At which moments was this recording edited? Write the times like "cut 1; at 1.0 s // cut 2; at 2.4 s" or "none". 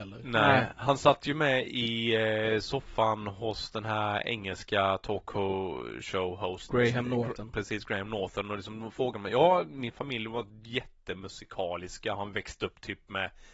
none